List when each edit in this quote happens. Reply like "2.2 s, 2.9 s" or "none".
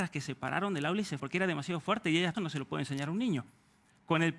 1.2 s, 2.3 s

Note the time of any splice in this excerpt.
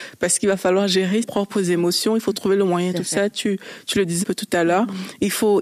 1.2 s, 2.9 s, 4.2 s

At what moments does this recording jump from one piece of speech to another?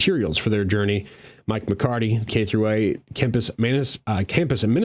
2.3 s

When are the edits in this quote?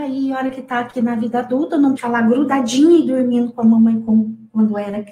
2.0 s

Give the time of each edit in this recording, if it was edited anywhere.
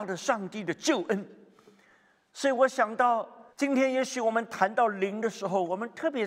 3.5 s

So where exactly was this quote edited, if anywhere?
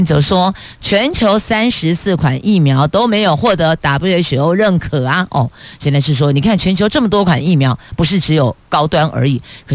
8.6 s

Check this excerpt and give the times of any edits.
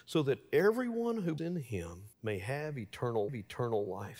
1.4 s, 2.1 s, 3.3 s

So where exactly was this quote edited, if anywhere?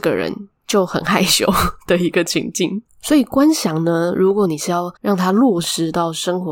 5.0 s

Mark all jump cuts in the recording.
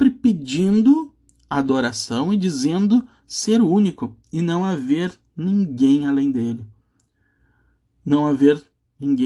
none

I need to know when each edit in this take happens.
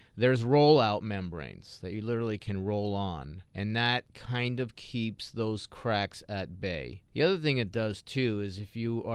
3.5 s

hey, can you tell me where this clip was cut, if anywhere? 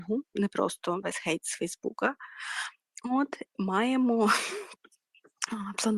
1.0 s, 3.5 s

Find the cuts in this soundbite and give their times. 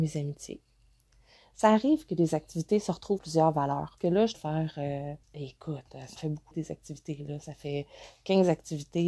3.2 s, 4.0 s, 4.3 s, 5.2 s, 6.2 s, 6.5 s

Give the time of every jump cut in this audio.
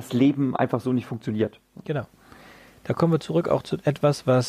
none

